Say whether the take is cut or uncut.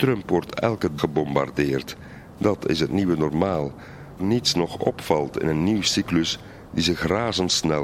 cut